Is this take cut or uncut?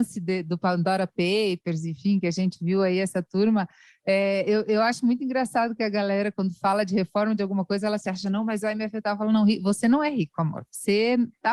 uncut